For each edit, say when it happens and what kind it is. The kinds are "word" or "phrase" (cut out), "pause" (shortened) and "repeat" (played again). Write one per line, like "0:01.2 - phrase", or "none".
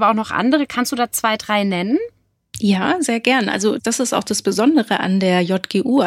0:03.8 - word